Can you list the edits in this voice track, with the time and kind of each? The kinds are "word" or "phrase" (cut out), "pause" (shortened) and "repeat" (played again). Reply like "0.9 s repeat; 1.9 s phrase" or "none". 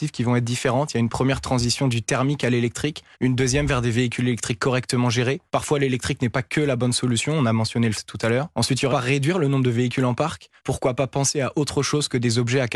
3.1 s pause; 5.5 s pause; 7.9 s word; 8.5 s pause; 8.9 s phrase; 10.6 s pause